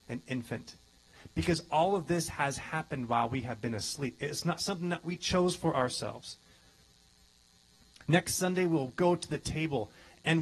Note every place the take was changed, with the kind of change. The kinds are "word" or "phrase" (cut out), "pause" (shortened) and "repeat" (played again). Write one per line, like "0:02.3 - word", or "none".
none